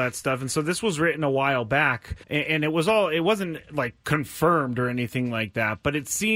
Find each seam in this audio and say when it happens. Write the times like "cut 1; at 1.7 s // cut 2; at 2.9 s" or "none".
cut 1; at 2.2 s